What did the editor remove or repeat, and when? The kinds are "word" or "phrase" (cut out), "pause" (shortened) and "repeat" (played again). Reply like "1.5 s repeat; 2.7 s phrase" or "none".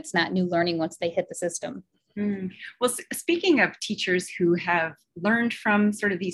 none